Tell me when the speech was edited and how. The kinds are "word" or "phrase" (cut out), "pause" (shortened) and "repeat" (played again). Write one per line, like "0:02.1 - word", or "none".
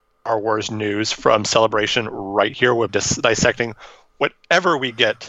0:02.9 - word